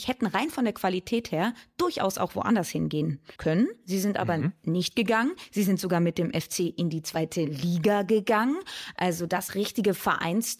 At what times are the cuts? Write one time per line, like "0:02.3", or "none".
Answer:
0:03.4
0:09.5